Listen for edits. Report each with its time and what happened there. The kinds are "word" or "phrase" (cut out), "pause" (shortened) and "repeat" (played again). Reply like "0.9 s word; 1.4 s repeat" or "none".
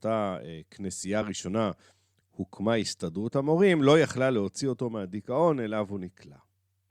none